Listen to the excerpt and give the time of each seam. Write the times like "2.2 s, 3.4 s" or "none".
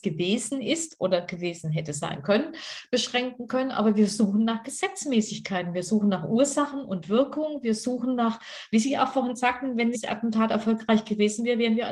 9.9 s

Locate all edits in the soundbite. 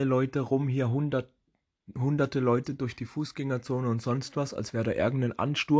none

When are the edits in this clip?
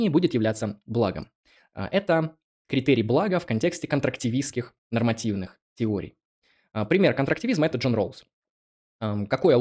4.8 s

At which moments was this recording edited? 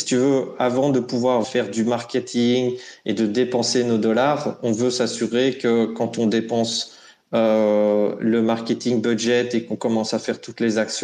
1.4 s

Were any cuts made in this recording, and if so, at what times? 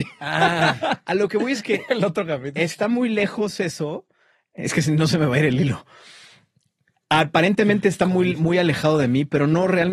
none

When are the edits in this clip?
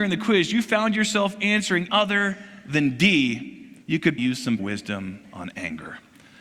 1.9 s, 3.8 s, 4.2 s, 4.6 s

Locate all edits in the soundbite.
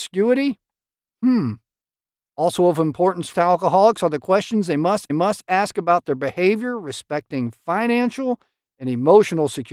3.3 s, 5.1 s

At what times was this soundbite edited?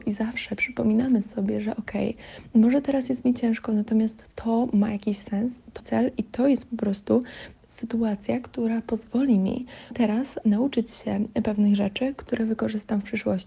5.8 s, 7.6 s, 9.9 s

